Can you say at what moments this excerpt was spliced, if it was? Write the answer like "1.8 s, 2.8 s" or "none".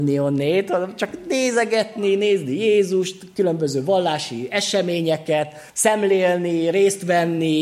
5.7 s

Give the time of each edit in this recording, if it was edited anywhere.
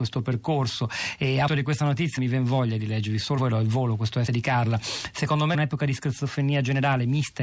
1.5 s, 2.2 s, 3.4 s, 4.3 s, 5.5 s

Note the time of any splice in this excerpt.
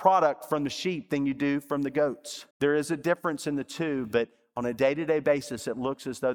2.5 s

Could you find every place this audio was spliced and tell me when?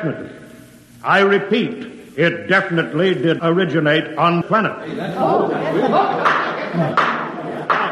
2.1 s, 3.4 s, 4.4 s

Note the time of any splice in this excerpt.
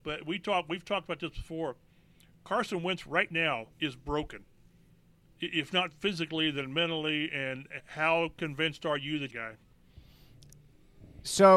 3.7 s, 7.8 s, 9.3 s

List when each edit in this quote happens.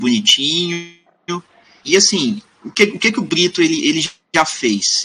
none

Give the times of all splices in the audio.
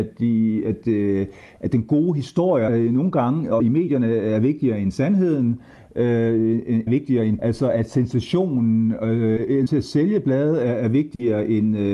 2.7 s, 3.6 s, 6.9 s, 7.4 s, 9.7 s

